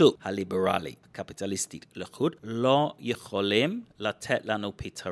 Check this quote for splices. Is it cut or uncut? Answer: cut